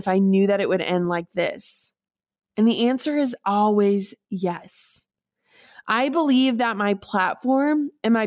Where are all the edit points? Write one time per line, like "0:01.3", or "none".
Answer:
none